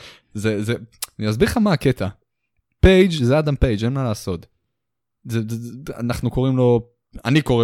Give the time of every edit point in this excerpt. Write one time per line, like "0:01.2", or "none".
none

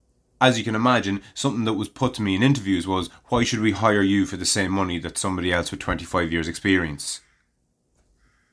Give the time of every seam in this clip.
none

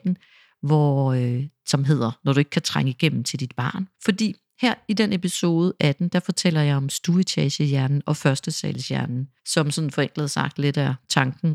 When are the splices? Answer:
0:03.9
0:09.4

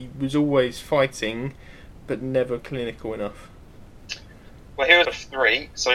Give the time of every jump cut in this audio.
0:02.6
0:05.0

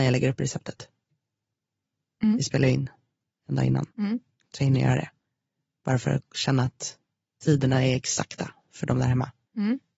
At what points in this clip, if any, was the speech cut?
0:03.9

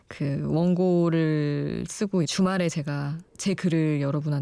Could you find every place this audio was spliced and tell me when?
0:01.9
0:02.2
0:03.3

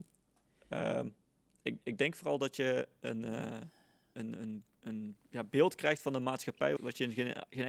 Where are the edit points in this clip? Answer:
0:01.8
0:04.1
0:06.8

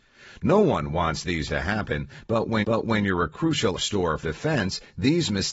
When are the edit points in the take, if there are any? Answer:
0:01.5
0:02.6
0:03.8
0:04.2

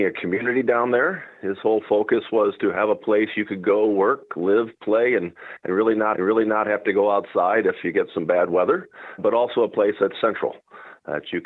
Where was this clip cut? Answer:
0:06.1
0:09.2

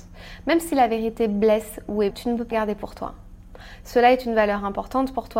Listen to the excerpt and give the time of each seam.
0:02.1
0:02.5

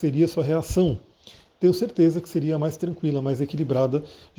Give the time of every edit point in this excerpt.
none

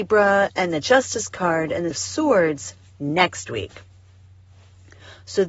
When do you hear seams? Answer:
0:01.9

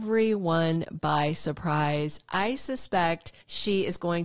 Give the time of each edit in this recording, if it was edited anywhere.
none

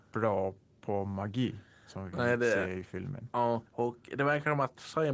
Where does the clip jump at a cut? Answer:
0:03.7

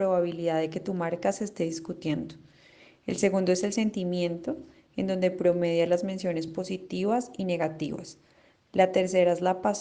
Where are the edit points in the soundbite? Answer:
none

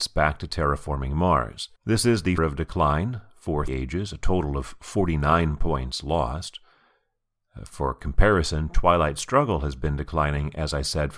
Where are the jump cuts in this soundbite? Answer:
0:01.8
0:02.4
0:03.7

